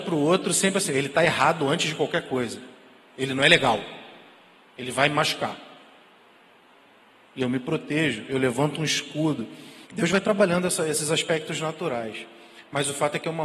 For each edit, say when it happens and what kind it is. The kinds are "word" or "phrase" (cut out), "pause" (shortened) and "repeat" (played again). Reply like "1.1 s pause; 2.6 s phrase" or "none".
9.9 s pause